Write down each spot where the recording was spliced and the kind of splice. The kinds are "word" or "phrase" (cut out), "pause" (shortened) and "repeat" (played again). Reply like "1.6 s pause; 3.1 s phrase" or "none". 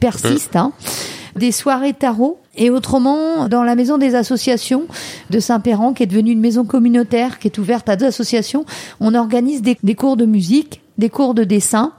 2.4 s pause; 3.5 s word; 8.0 s word; 9.8 s word